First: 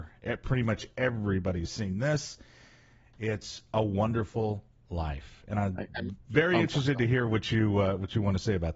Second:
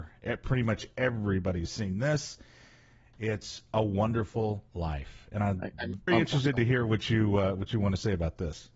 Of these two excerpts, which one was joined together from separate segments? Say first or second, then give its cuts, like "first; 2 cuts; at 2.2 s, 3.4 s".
second; 2 cuts; at 4.7 s, 6.1 s